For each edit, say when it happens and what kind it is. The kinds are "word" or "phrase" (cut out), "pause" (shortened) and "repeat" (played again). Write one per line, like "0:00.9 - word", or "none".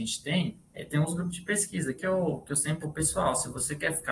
0:02.0 - phrase
0:02.8 - word